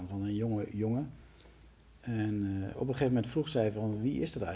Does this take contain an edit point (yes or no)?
no